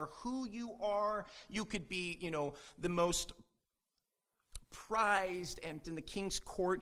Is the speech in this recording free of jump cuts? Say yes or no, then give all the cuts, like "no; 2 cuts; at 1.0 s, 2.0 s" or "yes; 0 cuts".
no; 1 cut; at 5.8 s